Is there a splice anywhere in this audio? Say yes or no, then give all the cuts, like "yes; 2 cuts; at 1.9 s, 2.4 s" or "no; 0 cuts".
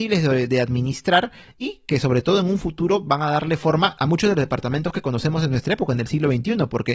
no; 0 cuts